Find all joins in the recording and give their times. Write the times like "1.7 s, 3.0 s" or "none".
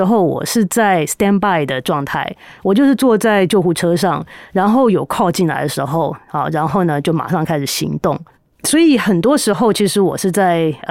none